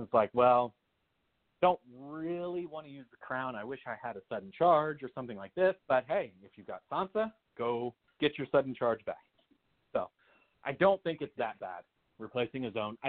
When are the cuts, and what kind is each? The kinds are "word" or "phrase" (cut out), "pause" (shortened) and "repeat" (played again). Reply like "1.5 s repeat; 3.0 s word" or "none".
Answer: 5.8 s pause